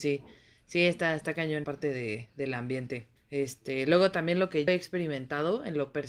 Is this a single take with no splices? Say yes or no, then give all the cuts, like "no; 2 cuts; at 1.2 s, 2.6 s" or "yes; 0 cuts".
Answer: no; 3 cuts; at 1.6 s, 3.2 s, 4.7 s